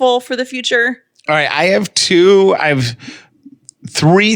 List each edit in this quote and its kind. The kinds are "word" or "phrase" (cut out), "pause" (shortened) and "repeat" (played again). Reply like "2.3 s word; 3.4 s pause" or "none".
none